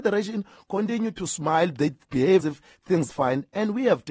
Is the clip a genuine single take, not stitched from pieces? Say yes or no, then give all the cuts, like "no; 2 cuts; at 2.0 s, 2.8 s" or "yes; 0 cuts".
no; 2 cuts; at 2.4 s, 3.1 s